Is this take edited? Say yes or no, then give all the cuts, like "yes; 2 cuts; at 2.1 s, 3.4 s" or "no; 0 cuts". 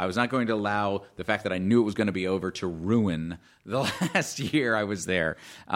no; 0 cuts